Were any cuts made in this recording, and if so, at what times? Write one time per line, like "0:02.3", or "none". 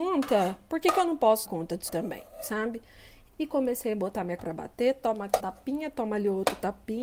0:01.4
0:01.9
0:03.3
0:04.4
0:05.4